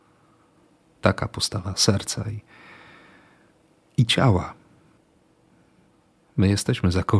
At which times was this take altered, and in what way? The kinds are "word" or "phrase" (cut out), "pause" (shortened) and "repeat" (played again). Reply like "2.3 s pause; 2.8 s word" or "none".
none